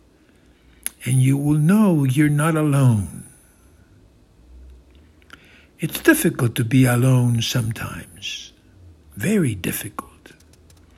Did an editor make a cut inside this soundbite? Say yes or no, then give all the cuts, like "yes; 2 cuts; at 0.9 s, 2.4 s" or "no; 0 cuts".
no; 0 cuts